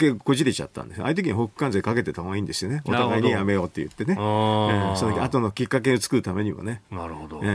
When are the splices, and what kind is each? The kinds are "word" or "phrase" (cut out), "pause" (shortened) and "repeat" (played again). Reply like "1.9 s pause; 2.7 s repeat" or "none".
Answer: none